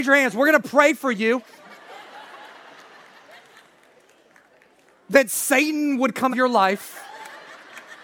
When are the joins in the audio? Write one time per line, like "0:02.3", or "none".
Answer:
0:06.3